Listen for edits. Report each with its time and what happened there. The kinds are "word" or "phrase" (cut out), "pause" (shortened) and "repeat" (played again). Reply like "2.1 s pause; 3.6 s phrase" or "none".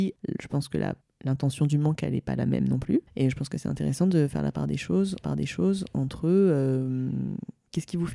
1.0 s pause; 3.1 s pause; 5.2 s repeat